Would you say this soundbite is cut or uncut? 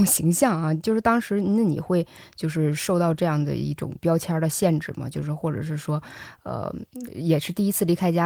uncut